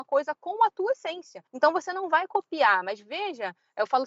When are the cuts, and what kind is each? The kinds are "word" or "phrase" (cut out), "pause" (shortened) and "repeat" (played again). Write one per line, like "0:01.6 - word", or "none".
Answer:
0:01.5 - pause